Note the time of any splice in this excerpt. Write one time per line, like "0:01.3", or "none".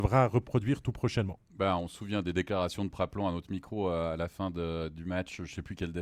none